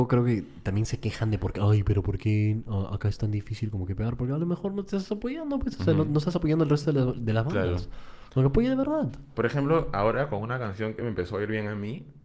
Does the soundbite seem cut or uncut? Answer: uncut